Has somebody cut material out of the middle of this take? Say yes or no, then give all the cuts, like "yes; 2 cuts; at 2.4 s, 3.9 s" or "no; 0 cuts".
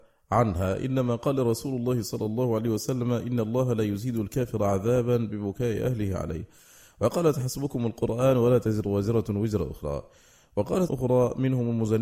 yes; 1 cut; at 10.9 s